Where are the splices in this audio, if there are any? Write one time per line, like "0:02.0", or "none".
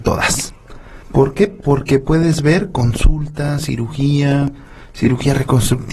0:01.0